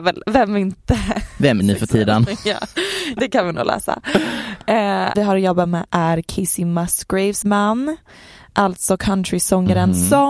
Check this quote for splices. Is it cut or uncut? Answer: cut